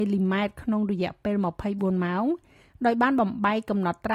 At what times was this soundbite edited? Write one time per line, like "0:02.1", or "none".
none